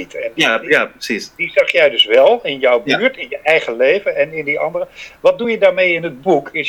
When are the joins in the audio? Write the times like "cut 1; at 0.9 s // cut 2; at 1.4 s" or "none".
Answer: none